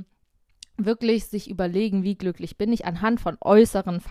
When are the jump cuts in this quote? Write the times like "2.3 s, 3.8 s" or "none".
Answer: none